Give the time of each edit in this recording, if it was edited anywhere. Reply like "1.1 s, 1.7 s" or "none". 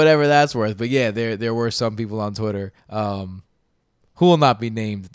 2.8 s